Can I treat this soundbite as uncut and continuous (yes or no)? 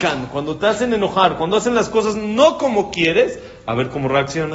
yes